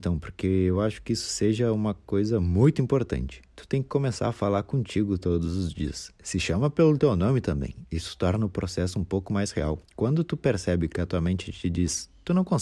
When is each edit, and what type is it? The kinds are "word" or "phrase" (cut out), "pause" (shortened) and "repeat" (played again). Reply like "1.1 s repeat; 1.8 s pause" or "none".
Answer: 9.8 s pause